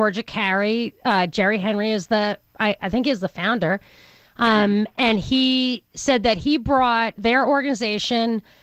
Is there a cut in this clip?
no; 0 cuts

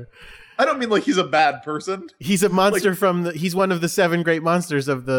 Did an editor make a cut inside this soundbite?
no; 0 cuts

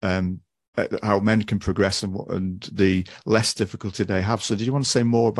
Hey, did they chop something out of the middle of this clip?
no; 0 cuts

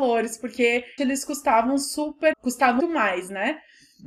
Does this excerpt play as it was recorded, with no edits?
no; 3 cuts; at 1.0 s, 2.3 s, 2.8 s

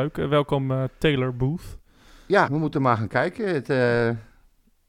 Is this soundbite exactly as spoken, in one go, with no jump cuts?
no; 1 cut; at 2.5 s

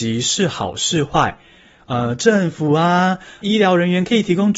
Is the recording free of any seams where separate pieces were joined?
no; 1 cut; at 3.4 s

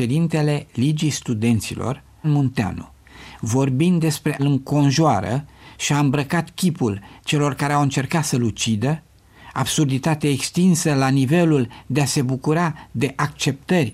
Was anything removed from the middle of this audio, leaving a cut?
yes; 2 cuts; at 2.2 s, 4.4 s

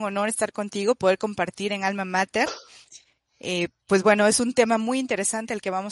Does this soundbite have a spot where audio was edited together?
no; 0 cuts

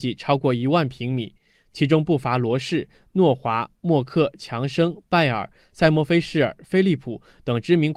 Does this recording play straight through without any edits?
yes; 0 cuts

